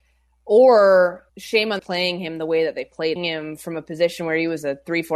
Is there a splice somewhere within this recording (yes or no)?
yes